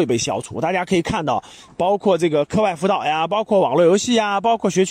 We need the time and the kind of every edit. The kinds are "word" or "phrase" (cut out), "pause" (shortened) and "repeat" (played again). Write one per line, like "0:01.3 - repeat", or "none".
none